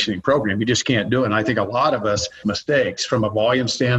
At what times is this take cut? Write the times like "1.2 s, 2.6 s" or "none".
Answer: 2.4 s